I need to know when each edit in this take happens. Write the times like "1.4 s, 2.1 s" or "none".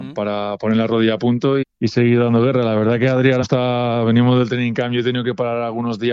1.6 s, 3.4 s